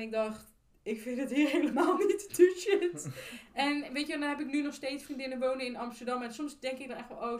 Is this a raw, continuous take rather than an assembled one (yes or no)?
yes